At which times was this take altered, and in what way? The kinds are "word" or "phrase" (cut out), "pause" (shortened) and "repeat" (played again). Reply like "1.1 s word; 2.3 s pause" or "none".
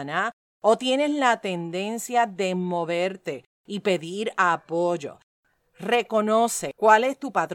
none